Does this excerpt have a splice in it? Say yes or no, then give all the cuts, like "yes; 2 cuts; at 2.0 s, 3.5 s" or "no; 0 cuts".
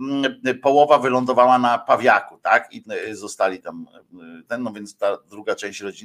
yes; 1 cut; at 2.8 s